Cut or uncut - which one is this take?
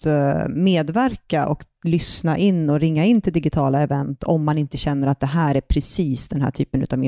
uncut